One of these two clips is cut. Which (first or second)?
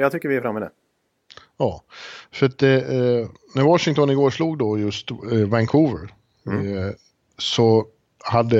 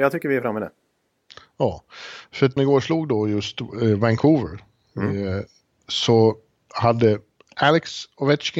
second